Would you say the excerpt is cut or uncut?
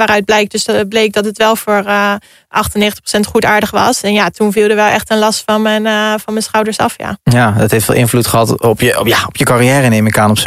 uncut